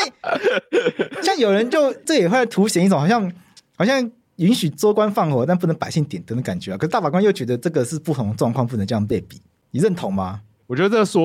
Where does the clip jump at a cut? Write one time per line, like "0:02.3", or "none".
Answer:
none